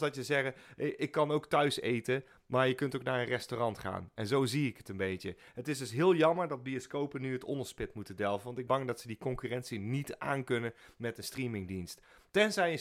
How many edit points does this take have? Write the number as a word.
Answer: one